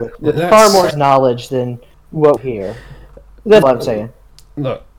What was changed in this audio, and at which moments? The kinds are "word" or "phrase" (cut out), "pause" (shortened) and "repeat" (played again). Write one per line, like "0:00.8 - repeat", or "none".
0:00.9 - word
0:02.4 - phrase
0:03.6 - word